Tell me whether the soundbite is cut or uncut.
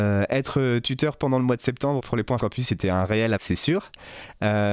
cut